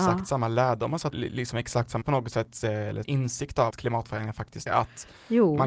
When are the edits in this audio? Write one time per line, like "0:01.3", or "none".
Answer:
0:01.1
0:02.0
0:03.0
0:03.7
0:04.7